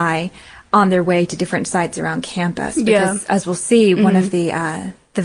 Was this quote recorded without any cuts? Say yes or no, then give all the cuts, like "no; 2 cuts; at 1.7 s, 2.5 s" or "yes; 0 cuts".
yes; 0 cuts